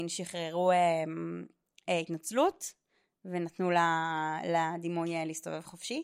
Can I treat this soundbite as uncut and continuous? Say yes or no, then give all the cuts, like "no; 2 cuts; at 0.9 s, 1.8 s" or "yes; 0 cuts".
yes; 0 cuts